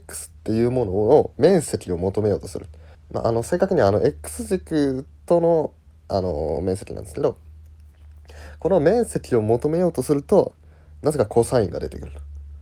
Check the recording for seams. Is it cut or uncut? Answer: cut